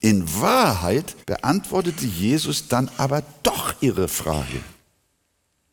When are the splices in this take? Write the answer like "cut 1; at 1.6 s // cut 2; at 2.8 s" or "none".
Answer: cut 1; at 1.2 s